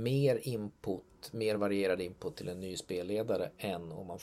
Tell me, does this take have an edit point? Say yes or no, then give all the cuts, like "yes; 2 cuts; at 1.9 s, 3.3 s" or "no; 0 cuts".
no; 0 cuts